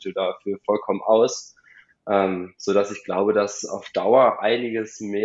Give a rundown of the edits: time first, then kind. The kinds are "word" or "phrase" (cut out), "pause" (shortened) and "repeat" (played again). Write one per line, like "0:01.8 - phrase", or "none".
none